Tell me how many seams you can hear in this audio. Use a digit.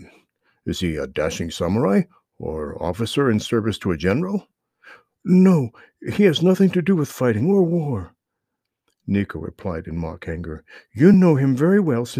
0